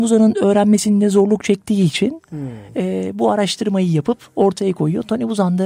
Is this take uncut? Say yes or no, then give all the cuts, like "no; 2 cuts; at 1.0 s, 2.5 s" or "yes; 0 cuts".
yes; 0 cuts